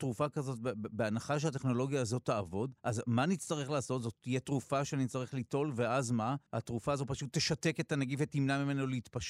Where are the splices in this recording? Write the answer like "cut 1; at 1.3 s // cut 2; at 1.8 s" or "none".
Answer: cut 1; at 2.8 s // cut 2; at 6.5 s